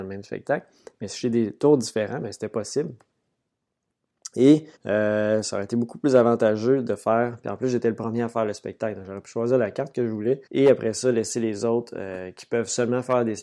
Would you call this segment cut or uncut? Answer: cut